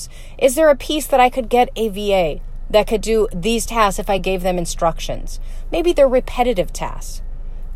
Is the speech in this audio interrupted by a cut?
no; 0 cuts

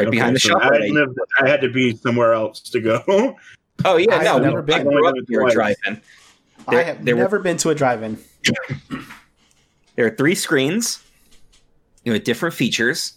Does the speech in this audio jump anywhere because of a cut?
no; 0 cuts

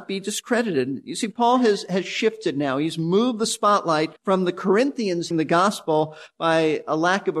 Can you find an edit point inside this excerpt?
yes; 2 cuts; at 4.2 s, 5.3 s

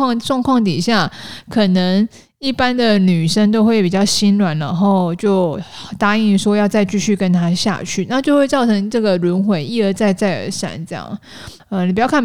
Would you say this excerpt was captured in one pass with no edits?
yes; 0 cuts

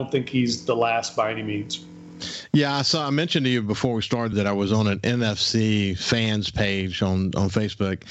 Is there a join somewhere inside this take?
yes; 1 cut; at 4.3 s

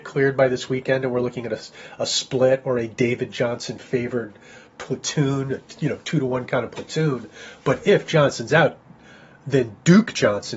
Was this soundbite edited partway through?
no; 0 cuts

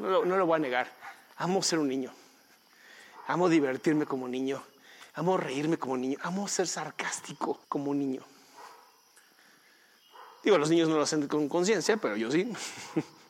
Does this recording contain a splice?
yes; 1 cut; at 7.6 s

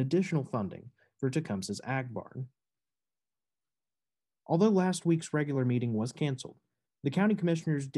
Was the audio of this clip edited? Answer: no; 0 cuts

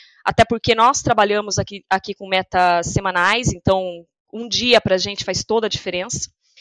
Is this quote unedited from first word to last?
yes; 0 cuts

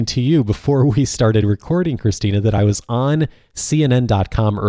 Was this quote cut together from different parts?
no; 0 cuts

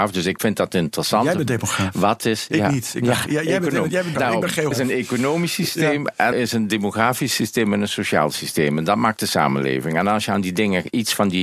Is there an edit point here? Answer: yes; 3 cuts; at 4.1 s, 4.7 s, 6.3 s

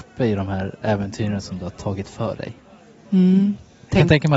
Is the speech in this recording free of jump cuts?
yes; 0 cuts

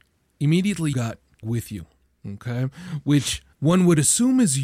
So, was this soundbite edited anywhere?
yes; 3 cuts; at 0.9 s, 1.4 s, 3.5 s

